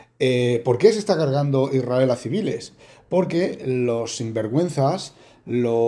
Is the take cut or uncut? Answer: uncut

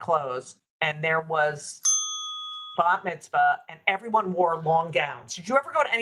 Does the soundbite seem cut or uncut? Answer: cut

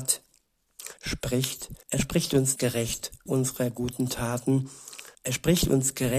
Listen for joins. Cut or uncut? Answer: cut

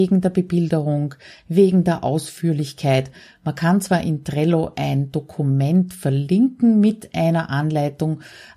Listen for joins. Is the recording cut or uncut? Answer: uncut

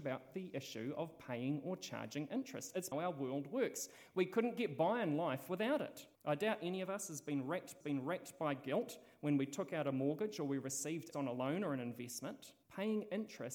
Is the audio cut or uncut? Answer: cut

